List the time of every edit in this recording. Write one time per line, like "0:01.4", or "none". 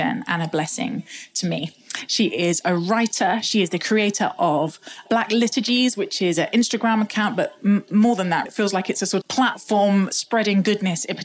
0:05.1
0:08.4
0:09.2